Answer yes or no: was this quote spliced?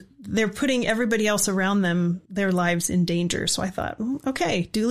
yes